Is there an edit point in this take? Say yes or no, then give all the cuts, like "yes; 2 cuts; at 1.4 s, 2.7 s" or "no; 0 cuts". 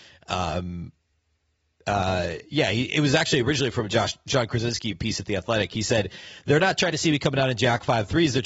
no; 0 cuts